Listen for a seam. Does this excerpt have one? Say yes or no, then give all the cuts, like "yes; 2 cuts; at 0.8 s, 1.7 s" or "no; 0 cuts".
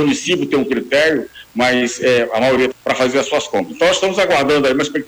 yes; 1 cut; at 2.7 s